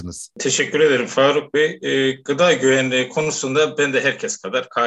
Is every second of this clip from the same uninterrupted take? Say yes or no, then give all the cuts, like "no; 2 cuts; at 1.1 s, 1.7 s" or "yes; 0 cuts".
yes; 0 cuts